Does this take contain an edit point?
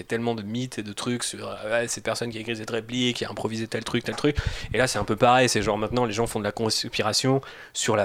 yes; 1 cut; at 2.0 s

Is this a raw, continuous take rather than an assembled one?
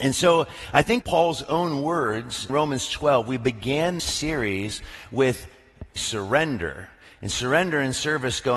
no; 4 cuts; at 1.0 s, 2.5 s, 4.0 s, 6.0 s

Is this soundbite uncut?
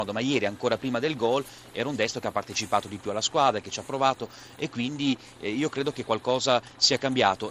yes; 0 cuts

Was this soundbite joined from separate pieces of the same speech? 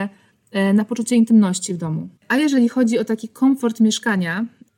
yes; 1 cut; at 2.2 s

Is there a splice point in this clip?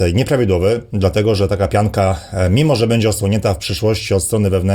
no; 0 cuts

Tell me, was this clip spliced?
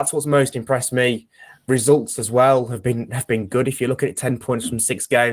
no; 0 cuts

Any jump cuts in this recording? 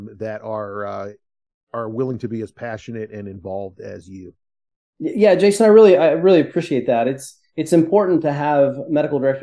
no; 0 cuts

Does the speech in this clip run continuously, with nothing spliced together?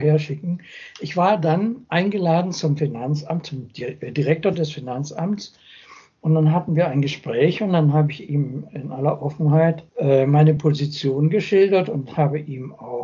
yes; 0 cuts

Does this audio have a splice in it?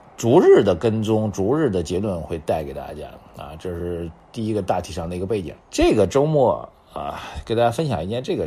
yes; 1 cut; at 5.6 s

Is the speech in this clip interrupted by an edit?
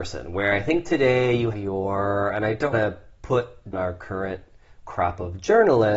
yes; 3 cuts; at 1.5 s, 2.7 s, 3.7 s

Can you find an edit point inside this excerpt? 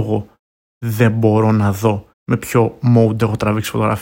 yes; 1 cut; at 2.1 s

